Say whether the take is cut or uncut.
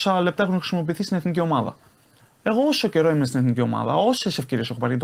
uncut